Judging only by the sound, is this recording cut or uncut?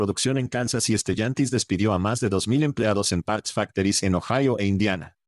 uncut